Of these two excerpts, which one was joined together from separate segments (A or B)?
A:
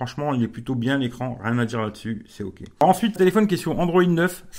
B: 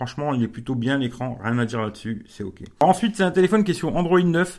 A